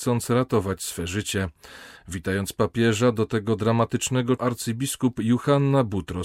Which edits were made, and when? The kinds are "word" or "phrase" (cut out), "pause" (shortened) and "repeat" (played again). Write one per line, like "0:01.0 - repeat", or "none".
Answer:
0:04.4 - phrase